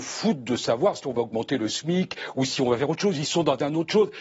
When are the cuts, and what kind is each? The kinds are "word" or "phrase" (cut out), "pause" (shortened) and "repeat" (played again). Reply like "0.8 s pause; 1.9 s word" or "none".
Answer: none